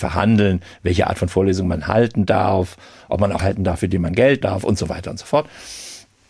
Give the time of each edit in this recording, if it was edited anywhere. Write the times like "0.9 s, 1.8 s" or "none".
3.4 s, 4.4 s